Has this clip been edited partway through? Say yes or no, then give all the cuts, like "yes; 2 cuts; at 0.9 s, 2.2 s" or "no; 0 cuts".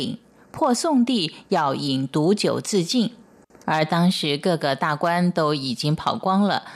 no; 0 cuts